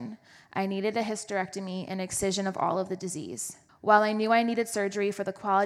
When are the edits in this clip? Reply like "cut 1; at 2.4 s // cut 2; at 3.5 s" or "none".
cut 1; at 3.7 s